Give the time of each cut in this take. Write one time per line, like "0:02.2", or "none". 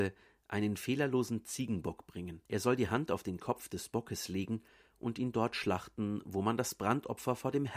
0:02.5